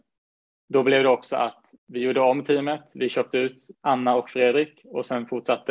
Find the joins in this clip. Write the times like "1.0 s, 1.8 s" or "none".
1.8 s, 3.7 s